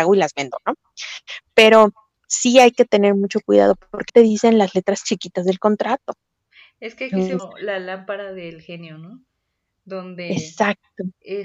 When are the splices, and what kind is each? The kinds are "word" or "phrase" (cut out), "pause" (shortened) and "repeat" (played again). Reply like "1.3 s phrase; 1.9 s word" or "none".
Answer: 4.1 s word; 7.4 s word